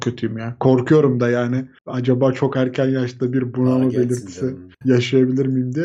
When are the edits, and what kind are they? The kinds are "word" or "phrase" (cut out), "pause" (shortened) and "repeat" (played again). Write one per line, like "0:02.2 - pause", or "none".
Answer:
0:01.8 - pause
0:04.7 - pause